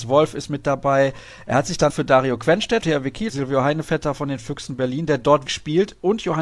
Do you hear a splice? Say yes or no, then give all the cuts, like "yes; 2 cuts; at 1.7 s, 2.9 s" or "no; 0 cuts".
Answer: yes; 4 cuts; at 1.9 s, 2.8 s, 3.3 s, 5.5 s